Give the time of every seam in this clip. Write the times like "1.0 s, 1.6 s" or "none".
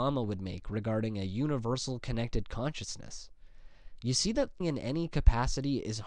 4.6 s